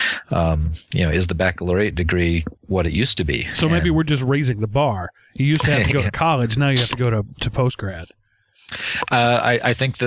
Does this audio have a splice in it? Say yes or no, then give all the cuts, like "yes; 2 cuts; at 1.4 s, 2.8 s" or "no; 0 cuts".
yes; 1 cut; at 2.6 s